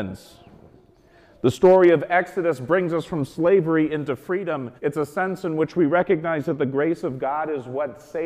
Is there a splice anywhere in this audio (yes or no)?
yes